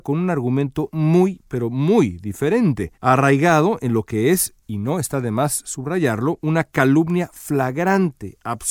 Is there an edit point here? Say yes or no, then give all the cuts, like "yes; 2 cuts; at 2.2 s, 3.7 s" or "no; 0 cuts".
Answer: yes; 2 cuts; at 2.9 s, 4.6 s